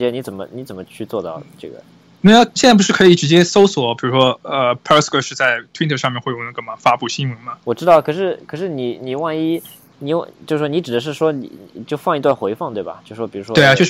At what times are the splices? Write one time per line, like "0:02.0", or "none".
none